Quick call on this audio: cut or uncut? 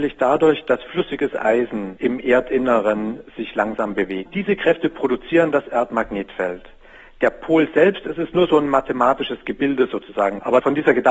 uncut